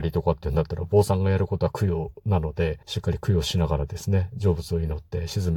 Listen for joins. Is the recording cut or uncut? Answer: cut